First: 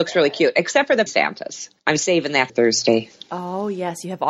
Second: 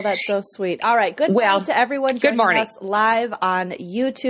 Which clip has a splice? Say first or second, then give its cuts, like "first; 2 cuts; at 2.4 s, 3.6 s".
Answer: first; 3 cuts; at 1.1 s, 1.8 s, 2.5 s